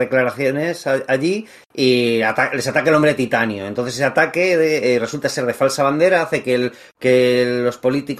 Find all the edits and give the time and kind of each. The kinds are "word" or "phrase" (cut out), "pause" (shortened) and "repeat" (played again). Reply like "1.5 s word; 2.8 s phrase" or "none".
none